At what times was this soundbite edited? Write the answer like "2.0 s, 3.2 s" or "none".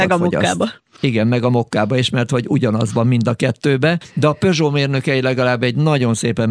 none